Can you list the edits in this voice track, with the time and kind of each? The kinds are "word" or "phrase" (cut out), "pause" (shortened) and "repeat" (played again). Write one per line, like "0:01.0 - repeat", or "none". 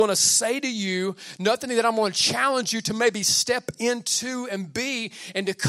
none